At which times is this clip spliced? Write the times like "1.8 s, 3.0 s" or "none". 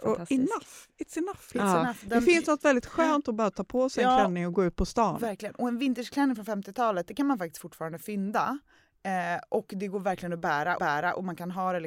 10.8 s